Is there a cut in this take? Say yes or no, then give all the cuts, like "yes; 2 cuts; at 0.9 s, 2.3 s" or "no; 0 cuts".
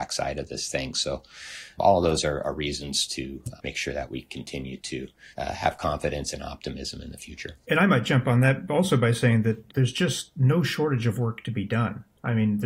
yes; 5 cuts; at 1.8 s, 3.6 s, 5.3 s, 7.6 s, 9.7 s